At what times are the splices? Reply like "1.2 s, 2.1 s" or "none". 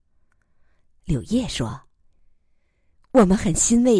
none